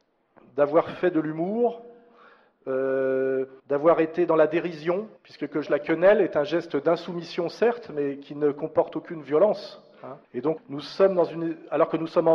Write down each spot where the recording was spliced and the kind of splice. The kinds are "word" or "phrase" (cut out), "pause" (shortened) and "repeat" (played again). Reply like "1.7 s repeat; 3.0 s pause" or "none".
3.6 s pause; 5.2 s pause; 5.7 s word; 10.2 s pause; 10.6 s word